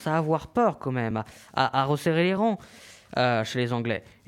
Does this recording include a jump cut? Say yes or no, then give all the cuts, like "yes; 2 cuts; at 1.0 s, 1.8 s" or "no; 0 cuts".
no; 0 cuts